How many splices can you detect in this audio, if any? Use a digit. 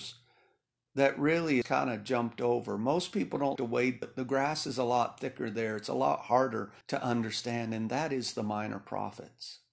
4